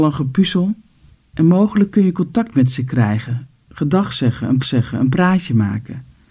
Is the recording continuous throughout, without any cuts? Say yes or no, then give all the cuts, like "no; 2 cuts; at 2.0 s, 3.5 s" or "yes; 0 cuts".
no; 2 cuts; at 1.1 s, 4.6 s